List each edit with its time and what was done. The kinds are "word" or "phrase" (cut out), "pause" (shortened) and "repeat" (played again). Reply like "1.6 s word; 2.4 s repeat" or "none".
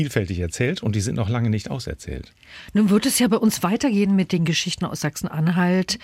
none